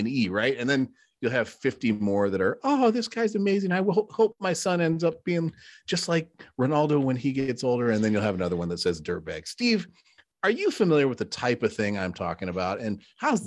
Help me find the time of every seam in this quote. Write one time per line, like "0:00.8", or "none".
none